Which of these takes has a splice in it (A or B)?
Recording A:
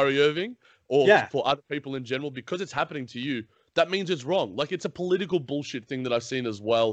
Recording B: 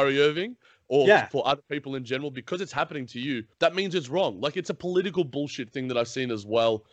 B